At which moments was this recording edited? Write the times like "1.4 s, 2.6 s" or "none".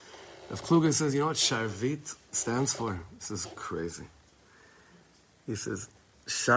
none